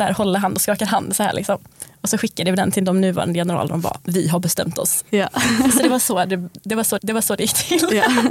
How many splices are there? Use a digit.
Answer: 1